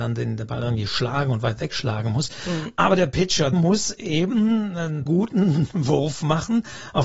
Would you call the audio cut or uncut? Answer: cut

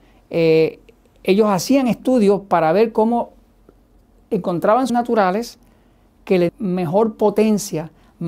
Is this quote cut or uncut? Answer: cut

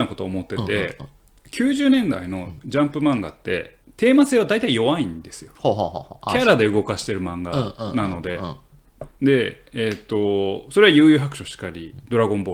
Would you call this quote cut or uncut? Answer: cut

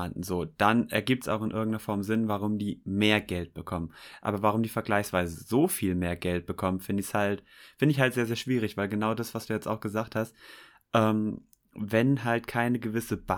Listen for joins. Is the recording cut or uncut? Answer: uncut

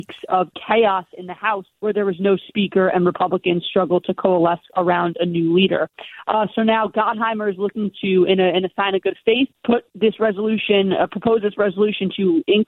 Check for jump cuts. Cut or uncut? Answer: cut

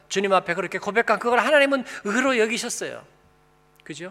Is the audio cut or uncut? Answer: uncut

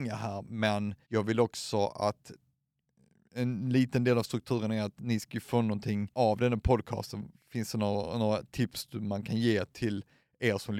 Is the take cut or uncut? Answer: cut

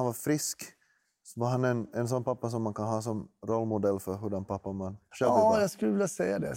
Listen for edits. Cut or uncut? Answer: uncut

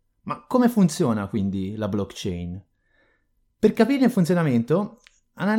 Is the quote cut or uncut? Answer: uncut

